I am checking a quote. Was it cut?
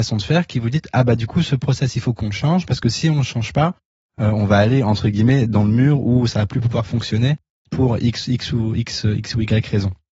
no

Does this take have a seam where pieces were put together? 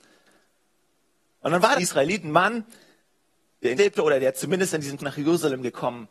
yes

